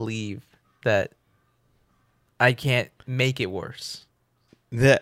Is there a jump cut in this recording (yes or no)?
no